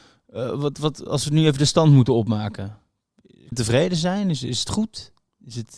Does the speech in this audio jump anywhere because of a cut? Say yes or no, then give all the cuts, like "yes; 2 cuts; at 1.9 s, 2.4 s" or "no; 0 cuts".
yes; 1 cut; at 3.5 s